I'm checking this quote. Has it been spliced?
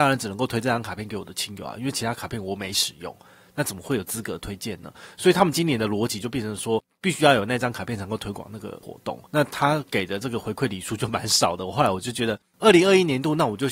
yes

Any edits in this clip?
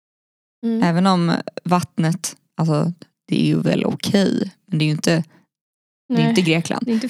no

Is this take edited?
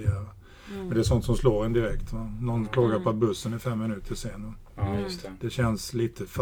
no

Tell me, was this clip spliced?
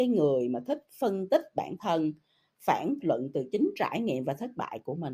yes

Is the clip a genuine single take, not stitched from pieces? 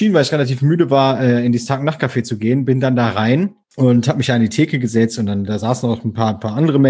no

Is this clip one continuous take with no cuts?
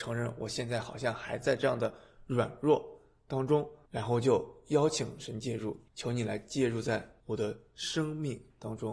no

